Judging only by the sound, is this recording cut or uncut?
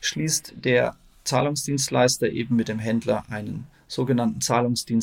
uncut